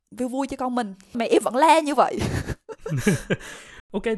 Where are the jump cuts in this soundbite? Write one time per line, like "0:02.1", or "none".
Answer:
0:01.1